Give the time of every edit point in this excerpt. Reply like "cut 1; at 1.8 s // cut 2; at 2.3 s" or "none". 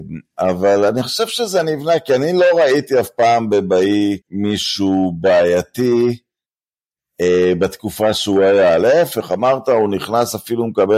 cut 1; at 4.2 s